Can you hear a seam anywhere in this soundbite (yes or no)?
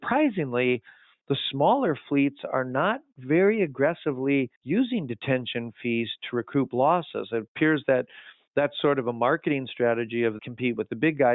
yes